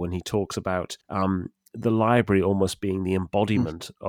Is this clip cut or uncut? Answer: cut